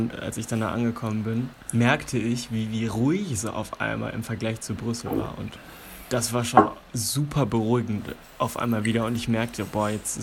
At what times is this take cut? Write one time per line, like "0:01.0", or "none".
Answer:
none